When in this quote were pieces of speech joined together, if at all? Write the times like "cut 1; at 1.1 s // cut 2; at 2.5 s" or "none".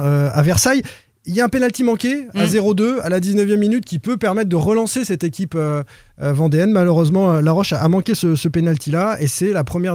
none